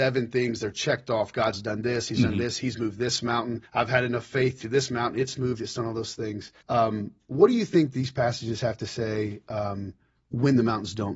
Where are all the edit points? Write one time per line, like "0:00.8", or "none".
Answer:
0:03.7
0:04.6
0:06.6